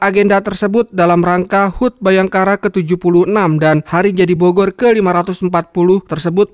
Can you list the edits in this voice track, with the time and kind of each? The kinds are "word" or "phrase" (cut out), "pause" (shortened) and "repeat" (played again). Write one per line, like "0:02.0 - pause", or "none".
none